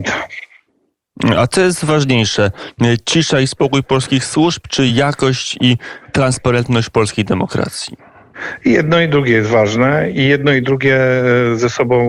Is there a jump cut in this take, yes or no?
no